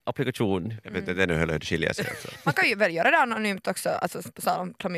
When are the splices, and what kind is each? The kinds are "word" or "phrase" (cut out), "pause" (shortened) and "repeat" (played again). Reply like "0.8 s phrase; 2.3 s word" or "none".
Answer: none